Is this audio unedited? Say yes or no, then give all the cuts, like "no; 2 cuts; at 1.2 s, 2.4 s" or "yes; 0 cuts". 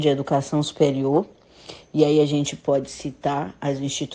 yes; 0 cuts